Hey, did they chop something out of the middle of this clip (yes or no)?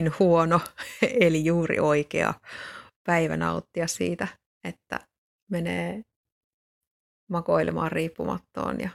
no